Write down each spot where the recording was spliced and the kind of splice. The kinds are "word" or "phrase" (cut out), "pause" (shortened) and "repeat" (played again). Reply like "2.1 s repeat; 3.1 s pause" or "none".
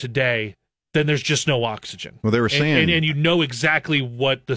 none